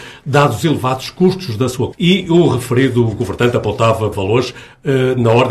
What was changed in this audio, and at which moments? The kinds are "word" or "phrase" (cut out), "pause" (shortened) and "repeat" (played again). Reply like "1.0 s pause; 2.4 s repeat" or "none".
1.9 s word; 4.1 s word